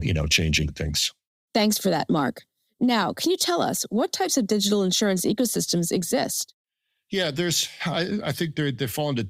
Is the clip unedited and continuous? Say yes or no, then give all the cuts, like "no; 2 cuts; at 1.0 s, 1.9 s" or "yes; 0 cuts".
yes; 0 cuts